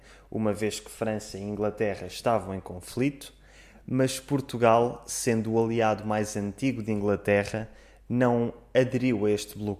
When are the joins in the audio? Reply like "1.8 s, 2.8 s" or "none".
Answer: none